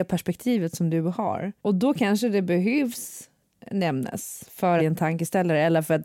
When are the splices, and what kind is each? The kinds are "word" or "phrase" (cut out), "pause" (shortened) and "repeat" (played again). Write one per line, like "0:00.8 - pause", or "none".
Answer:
0:01.6 - pause
0:04.8 - phrase